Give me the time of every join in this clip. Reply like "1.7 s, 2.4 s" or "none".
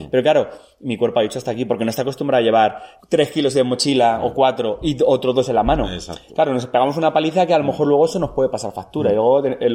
3.0 s